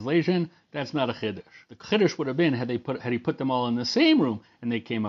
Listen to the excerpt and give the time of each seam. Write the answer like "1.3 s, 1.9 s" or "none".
1.6 s